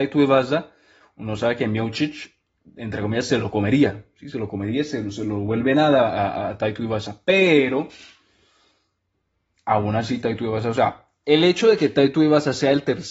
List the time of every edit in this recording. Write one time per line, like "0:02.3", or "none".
none